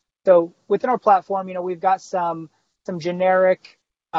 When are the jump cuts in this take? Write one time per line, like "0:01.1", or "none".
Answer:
none